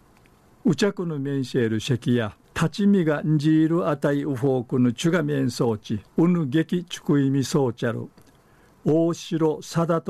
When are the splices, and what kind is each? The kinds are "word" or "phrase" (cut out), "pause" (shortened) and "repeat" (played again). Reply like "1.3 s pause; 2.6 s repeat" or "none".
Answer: 2.4 s pause; 6.1 s pause